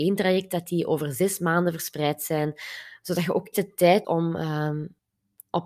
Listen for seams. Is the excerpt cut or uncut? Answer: cut